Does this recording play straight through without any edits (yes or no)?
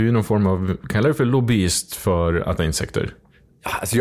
no